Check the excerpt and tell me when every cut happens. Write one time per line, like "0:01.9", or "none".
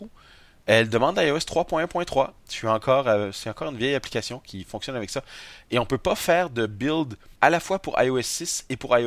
0:07.4